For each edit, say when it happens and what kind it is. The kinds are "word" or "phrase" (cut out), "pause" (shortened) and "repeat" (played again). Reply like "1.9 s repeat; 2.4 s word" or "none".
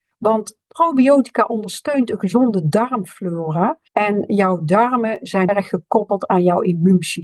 3.9 s pause; 5.5 s word